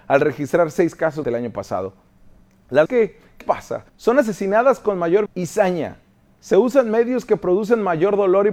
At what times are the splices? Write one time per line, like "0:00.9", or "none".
0:01.2
0:02.8
0:03.4
0:03.9
0:05.3